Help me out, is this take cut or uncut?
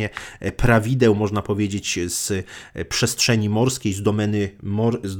uncut